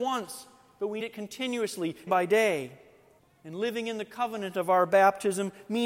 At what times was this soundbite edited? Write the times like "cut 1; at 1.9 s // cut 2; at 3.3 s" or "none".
cut 1; at 1.0 s // cut 2; at 2.1 s // cut 3; at 3.2 s